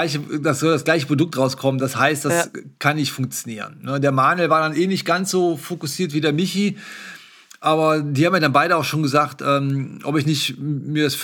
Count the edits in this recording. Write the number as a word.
zero